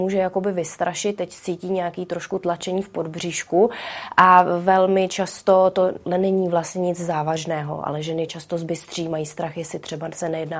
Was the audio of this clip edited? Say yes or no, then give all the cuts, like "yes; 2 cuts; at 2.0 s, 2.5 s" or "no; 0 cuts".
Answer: no; 0 cuts